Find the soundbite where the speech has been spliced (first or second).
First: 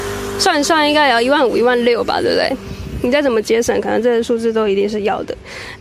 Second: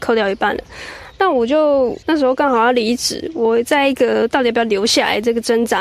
second